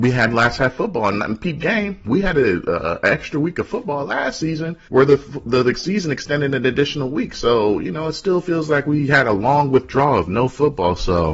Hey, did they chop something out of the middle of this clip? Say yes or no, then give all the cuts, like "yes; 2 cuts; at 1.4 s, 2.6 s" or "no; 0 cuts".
yes; 1 cut; at 4.9 s